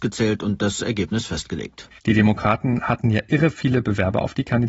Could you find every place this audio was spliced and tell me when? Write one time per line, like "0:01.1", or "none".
0:02.0

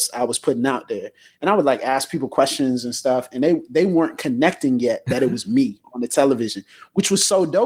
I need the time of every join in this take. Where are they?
none

